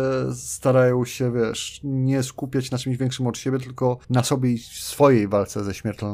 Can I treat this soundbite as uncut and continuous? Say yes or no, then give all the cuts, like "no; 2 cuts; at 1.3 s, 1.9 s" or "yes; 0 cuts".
no; 1 cut; at 4.0 s